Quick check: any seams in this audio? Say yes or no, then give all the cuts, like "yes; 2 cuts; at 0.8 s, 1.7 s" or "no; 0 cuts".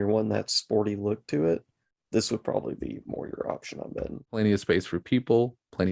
no; 0 cuts